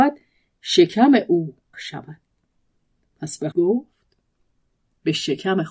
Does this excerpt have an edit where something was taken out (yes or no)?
yes